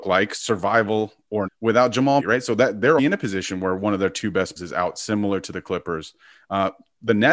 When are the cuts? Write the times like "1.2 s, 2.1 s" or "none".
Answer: 1.5 s, 2.2 s, 3.0 s, 4.6 s